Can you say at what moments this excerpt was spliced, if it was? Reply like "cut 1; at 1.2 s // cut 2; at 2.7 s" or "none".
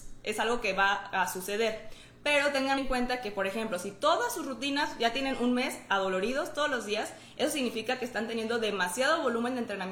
cut 1; at 2.8 s